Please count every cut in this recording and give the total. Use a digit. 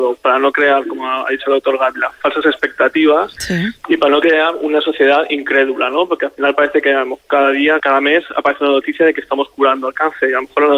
1